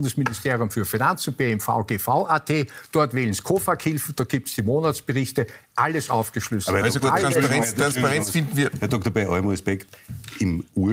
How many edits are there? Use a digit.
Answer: 0